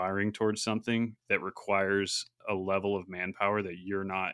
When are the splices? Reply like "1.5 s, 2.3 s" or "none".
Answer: none